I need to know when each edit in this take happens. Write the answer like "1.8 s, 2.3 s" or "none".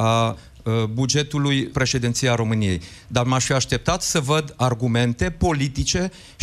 1.7 s